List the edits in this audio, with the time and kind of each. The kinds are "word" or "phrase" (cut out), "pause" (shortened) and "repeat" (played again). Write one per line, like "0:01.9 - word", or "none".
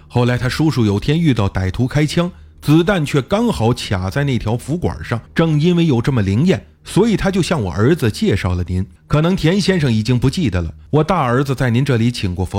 0:05.3 - pause
0:09.0 - pause
0:10.9 - pause